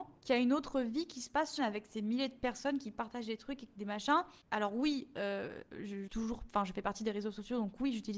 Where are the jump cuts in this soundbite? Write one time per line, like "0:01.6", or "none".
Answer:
0:01.6
0:04.4
0:06.1